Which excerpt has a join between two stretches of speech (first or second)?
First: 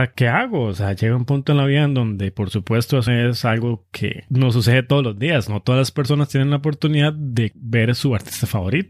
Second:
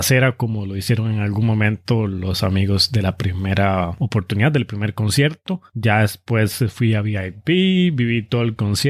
first